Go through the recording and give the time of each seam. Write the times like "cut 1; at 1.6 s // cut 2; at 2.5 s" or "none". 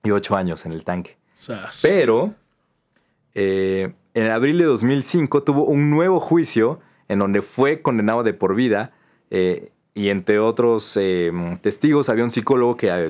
none